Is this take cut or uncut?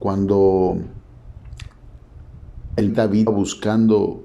cut